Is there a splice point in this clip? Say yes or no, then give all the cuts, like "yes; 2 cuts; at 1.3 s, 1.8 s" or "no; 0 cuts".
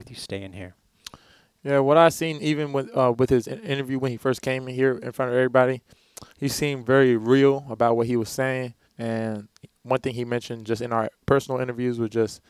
yes; 3 cuts; at 6.3 s, 8.8 s, 11.1 s